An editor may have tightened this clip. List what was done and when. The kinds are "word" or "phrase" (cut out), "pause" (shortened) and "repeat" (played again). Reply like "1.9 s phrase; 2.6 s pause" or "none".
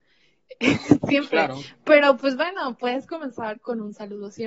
none